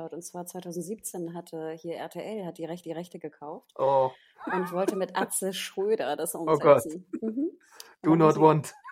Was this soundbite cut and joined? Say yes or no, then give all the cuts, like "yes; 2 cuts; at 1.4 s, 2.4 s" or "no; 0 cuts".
yes; 1 cut; at 2.8 s